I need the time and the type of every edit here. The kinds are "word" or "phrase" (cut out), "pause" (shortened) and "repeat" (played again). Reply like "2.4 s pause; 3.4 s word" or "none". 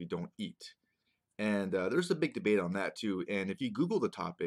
none